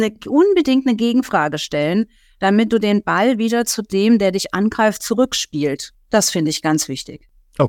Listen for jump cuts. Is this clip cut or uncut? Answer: uncut